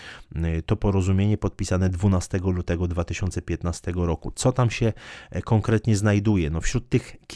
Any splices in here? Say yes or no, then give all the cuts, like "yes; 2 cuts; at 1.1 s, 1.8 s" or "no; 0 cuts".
no; 0 cuts